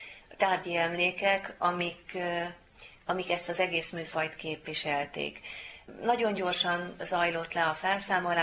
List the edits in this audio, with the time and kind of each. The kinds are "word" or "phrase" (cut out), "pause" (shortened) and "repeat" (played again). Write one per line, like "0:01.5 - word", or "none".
none